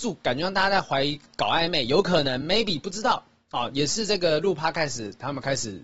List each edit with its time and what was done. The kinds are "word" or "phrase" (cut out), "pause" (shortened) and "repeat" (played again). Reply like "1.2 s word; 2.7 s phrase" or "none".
none